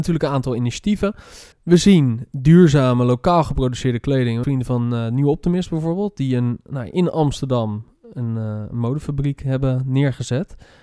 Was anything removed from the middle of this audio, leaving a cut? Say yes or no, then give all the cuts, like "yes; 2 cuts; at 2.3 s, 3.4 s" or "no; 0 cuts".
yes; 2 cuts; at 1.5 s, 4.4 s